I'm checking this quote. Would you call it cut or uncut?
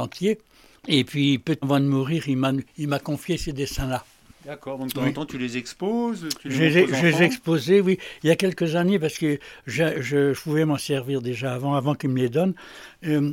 cut